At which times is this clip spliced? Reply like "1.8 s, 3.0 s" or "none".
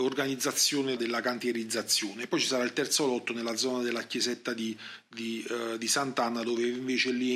1.0 s